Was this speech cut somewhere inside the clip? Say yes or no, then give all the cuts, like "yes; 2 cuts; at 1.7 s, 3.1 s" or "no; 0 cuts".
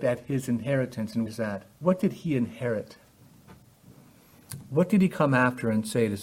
yes; 2 cuts; at 1.3 s, 1.7 s